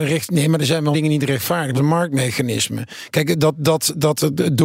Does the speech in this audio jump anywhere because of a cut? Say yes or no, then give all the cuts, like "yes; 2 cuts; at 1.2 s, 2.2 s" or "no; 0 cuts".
yes; 2 cuts; at 0.9 s, 1.7 s